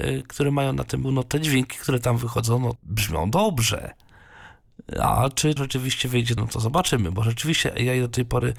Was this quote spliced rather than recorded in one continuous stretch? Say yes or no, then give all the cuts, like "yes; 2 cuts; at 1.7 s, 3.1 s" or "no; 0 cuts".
yes; 4 cuts; at 1.0 s, 2.8 s, 5.6 s, 6.4 s